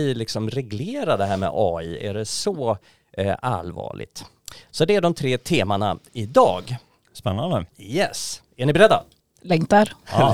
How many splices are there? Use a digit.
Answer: 1